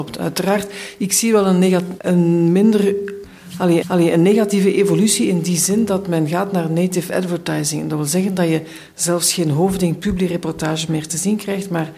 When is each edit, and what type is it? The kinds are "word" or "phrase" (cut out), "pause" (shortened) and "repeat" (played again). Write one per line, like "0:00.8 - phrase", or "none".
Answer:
0:02.0 - word
0:03.8 - repeat